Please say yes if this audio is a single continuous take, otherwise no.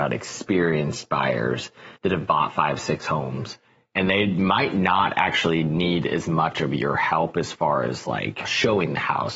no